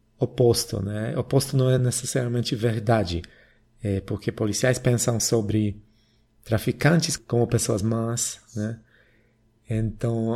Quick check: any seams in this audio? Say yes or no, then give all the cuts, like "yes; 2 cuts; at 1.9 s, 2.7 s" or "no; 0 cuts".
no; 0 cuts